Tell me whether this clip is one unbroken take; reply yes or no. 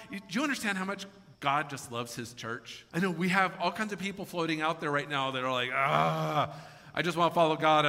no